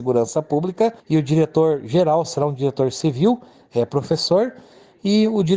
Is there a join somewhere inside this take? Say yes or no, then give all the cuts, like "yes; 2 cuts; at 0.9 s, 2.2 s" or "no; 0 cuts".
no; 0 cuts